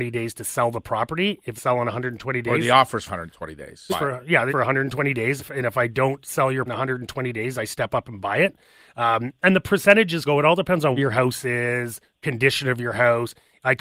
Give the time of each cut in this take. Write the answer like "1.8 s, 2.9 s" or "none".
1.6 s, 3.1 s, 3.9 s, 4.5 s, 5.4 s, 6.7 s, 10.2 s, 11.0 s